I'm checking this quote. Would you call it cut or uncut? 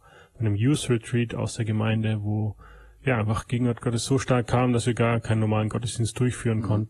uncut